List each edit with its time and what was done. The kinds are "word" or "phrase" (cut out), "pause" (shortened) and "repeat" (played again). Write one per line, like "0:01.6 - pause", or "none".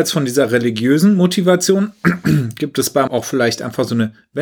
0:03.1 - word